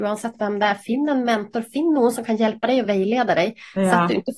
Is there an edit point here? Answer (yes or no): no